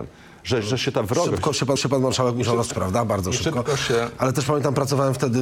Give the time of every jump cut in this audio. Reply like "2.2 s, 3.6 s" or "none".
1.8 s, 2.7 s

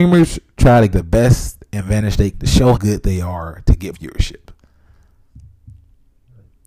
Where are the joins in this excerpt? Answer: 0.9 s, 2.3 s, 2.7 s, 3.9 s

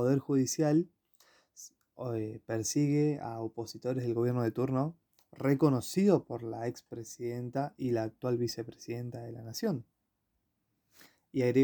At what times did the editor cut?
none

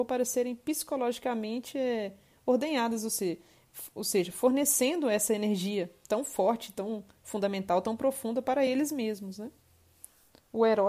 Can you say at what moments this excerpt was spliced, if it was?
none

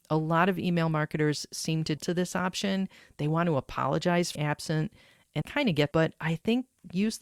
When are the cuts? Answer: 2.0 s, 4.4 s, 5.4 s, 5.9 s

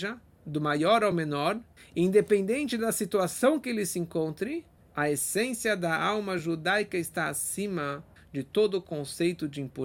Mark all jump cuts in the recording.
none

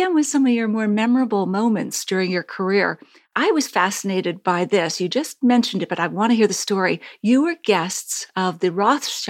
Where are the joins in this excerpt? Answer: none

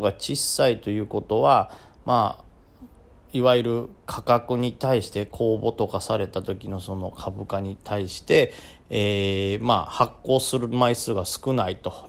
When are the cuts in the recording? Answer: none

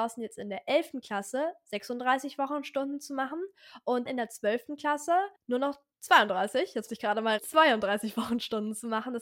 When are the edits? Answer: 4.1 s, 5.4 s, 5.9 s, 6.9 s, 7.4 s

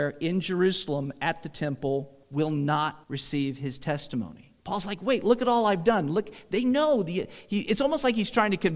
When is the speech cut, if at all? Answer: 2.2 s, 3.0 s, 4.6 s

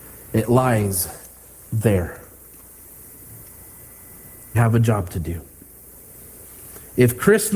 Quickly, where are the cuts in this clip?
4.5 s

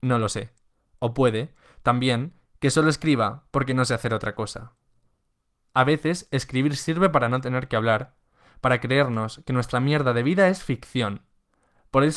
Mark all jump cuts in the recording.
none

